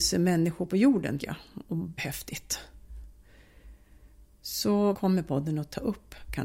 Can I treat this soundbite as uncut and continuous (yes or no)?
no